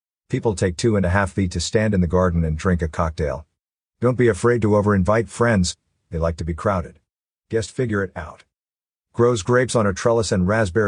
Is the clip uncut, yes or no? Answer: yes